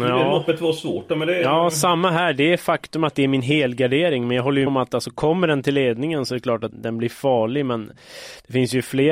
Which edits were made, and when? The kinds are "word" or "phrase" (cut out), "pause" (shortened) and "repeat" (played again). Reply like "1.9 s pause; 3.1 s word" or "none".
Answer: 4.7 s word; 6.7 s word